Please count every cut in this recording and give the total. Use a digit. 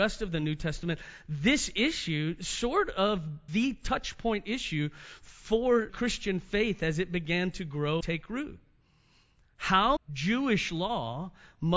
4